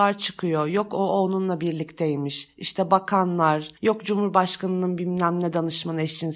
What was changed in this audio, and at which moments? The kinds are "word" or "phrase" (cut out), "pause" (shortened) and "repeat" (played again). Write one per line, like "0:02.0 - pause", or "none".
0:03.8 - pause

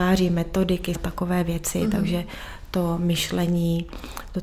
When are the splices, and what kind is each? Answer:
0:01.0 - word

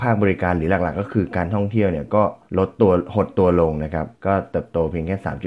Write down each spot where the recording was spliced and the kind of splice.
0:02.5 - pause
0:04.2 - pause

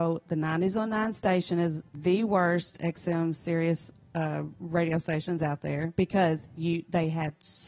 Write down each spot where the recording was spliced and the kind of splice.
0:01.9 - word

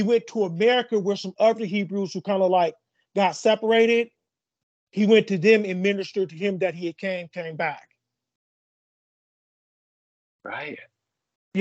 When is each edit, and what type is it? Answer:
none

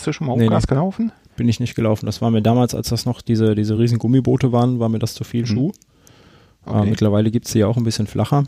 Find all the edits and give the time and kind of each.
none

